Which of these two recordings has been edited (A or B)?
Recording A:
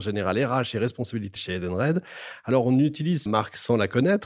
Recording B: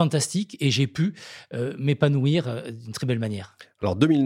A